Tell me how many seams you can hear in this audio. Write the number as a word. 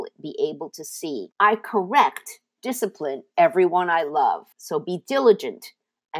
three